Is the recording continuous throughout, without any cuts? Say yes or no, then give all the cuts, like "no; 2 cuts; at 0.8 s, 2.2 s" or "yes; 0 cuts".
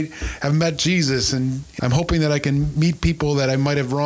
no; 1 cut; at 1.8 s